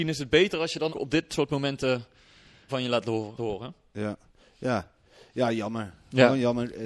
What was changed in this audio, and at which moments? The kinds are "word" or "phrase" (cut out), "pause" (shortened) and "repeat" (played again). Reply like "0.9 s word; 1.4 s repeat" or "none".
0.9 s word; 2.7 s word; 3.4 s word